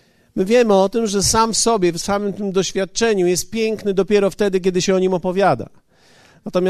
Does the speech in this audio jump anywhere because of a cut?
no; 0 cuts

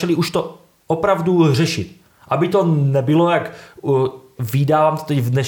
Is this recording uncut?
yes; 0 cuts

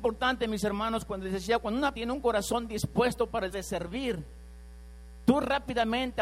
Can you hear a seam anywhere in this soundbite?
yes; 2 cuts; at 1.9 s, 3.5 s

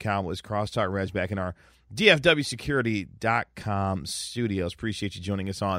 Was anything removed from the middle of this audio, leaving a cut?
no; 0 cuts

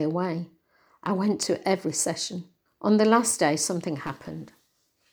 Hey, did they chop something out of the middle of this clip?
yes; 1 cut; at 2.7 s

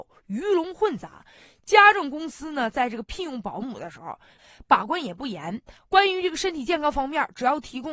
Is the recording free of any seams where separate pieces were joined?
yes; 0 cuts

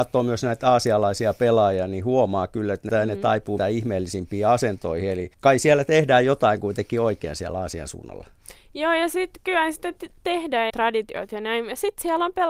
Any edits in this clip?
yes; 4 cuts; at 2.9 s, 3.6 s, 5.3 s, 10.7 s

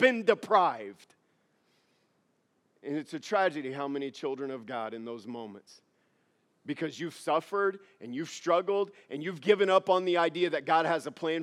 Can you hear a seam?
no; 0 cuts

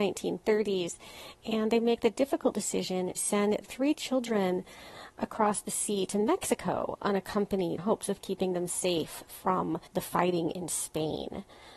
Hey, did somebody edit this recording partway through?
yes; 4 cuts; at 3.2 s, 3.6 s, 7.8 s, 9.9 s

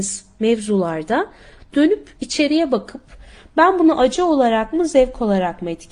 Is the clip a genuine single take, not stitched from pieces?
yes; 0 cuts

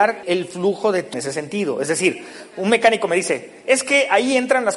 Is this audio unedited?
no; 1 cut; at 1.1 s

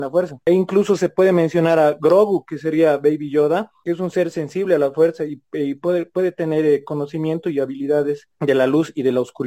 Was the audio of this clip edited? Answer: no; 0 cuts

